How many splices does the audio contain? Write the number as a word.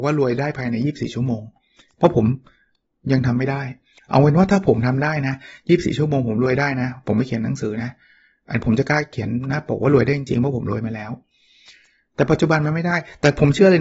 zero